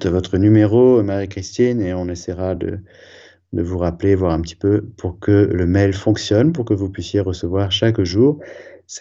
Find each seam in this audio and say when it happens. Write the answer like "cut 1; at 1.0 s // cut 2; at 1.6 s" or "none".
none